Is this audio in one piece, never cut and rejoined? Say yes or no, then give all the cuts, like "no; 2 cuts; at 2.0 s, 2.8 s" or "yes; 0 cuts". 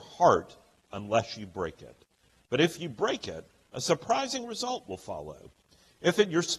yes; 0 cuts